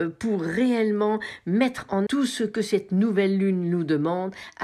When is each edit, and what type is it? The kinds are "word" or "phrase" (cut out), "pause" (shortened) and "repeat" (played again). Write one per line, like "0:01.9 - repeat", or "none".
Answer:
0:02.1 - word